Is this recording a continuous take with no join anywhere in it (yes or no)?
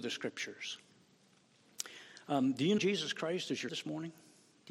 no